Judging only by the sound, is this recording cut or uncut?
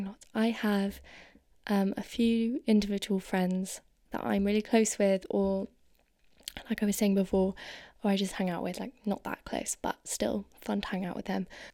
uncut